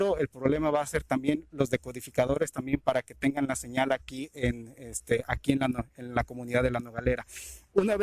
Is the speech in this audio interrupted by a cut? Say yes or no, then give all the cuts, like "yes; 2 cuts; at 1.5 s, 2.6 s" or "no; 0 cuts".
no; 0 cuts